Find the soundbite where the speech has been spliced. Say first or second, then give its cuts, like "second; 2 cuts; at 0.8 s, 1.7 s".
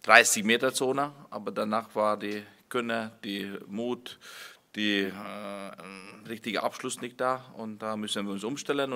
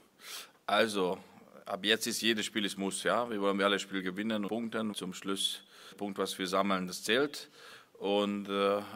second; 3 cuts; at 4.5 s, 4.9 s, 5.9 s